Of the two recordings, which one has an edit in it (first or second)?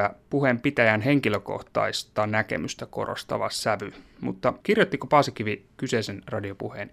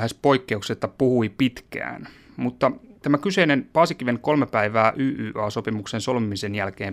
first